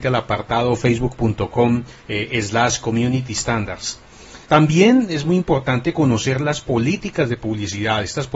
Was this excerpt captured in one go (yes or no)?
no